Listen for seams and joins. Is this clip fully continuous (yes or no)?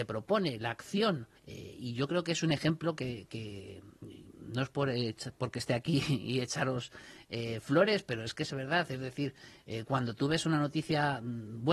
no